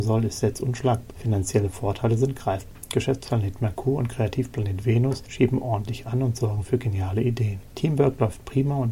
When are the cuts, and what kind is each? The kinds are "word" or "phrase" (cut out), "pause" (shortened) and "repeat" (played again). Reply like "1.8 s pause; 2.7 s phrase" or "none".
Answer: none